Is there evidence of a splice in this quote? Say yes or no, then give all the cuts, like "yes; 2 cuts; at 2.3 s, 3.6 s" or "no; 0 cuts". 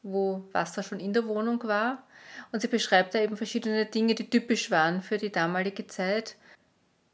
no; 0 cuts